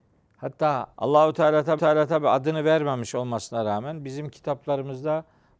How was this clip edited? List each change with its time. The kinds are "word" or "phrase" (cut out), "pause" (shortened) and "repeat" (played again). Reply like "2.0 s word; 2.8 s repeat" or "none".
0.9 s pause; 1.8 s repeat